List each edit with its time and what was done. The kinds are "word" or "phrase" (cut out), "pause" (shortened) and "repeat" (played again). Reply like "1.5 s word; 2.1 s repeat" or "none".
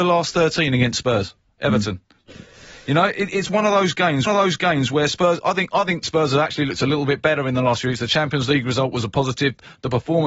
4.3 s repeat